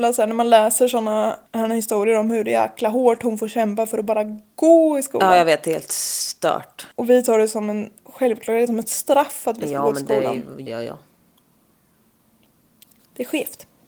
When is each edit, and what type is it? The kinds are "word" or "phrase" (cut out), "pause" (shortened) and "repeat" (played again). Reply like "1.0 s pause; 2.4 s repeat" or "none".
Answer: 1.5 s pause; 6.9 s pause; 8.7 s word; 10.7 s word